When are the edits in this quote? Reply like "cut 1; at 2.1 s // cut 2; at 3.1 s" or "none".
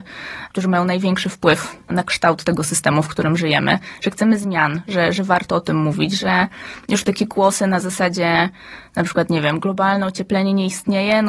cut 1; at 1.9 s